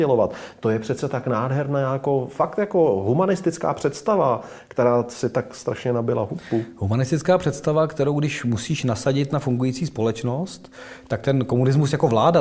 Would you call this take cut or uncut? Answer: uncut